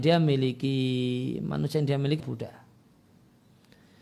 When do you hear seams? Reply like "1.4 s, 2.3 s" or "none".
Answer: 2.2 s